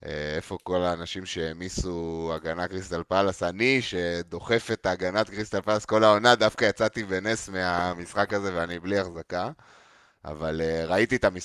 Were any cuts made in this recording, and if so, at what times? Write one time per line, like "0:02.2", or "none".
none